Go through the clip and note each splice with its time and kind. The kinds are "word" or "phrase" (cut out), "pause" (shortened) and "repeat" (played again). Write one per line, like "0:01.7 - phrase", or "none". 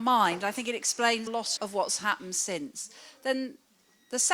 0:01.3 - word
0:01.6 - word